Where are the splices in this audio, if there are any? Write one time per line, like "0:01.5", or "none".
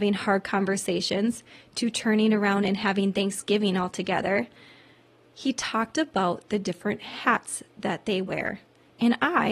none